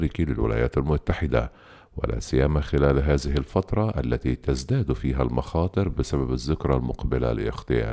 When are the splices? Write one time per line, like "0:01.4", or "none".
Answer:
none

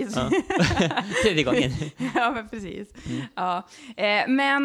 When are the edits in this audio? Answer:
none

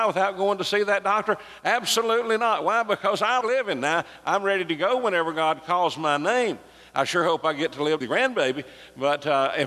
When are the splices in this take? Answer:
0:03.4
0:08.0

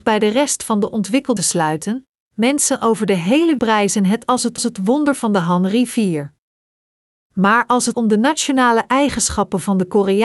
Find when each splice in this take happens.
0:01.4
0:03.6
0:04.6
0:07.9

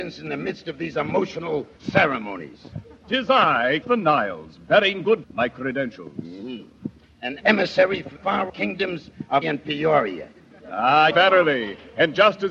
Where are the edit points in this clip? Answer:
0:01.8
0:03.8
0:05.2
0:07.4
0:08.2
0:08.5
0:09.4
0:11.1

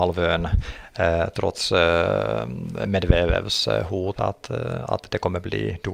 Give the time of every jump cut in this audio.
0:01.3
0:04.2

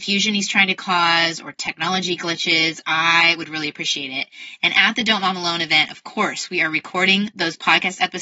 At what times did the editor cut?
none

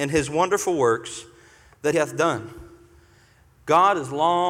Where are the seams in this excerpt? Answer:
0:01.9

